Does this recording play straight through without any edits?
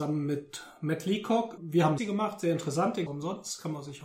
no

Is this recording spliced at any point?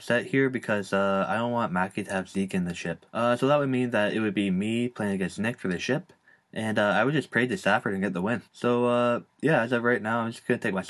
yes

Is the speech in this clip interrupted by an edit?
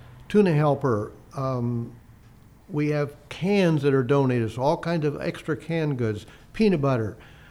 no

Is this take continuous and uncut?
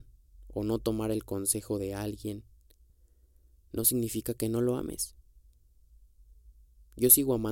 yes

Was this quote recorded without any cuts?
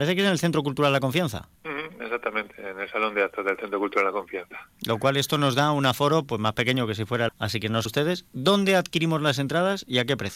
no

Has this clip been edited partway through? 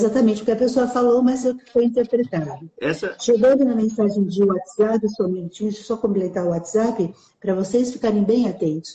no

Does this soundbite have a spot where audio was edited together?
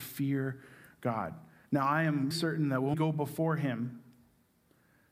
yes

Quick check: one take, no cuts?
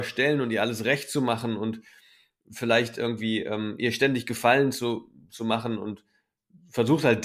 yes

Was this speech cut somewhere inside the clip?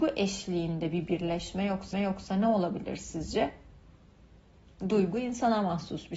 yes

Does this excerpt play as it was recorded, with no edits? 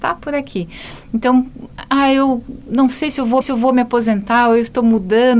no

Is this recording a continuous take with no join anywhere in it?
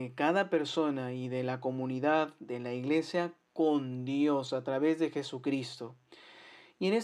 yes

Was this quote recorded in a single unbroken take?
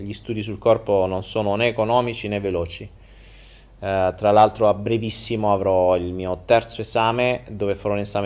yes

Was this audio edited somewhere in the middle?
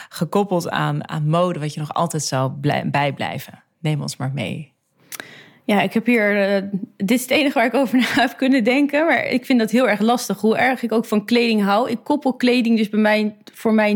no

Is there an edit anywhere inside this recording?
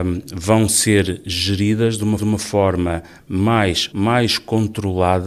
yes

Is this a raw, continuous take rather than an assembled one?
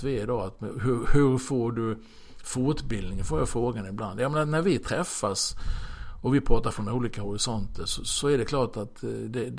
no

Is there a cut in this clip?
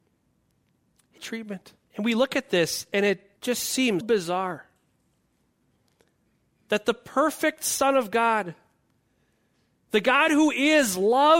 yes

